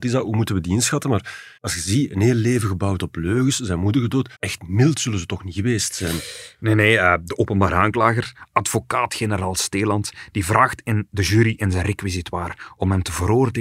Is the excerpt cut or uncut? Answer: cut